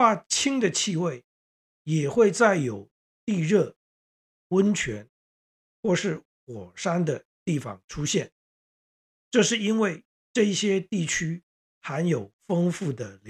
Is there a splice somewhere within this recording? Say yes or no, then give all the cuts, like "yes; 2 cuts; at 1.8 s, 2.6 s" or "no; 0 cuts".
no; 0 cuts